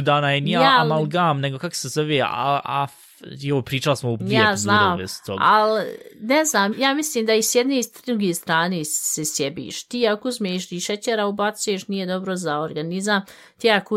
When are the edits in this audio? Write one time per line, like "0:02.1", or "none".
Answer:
0:02.6
0:04.2
0:06.7